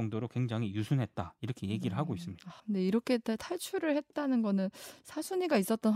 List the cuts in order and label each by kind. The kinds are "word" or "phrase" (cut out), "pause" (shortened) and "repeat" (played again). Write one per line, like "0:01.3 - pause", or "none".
0:02.6 - pause